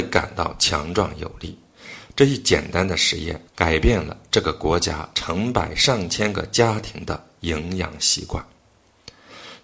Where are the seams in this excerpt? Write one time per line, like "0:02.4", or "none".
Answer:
0:03.5